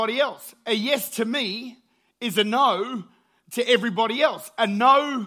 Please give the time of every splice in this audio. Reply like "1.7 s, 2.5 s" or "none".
none